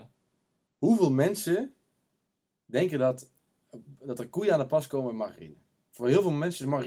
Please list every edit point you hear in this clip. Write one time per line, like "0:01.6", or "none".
none